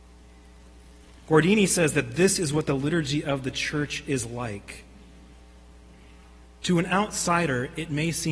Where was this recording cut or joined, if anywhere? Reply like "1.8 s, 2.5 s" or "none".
none